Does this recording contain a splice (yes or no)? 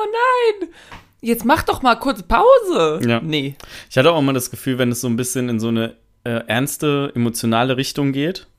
no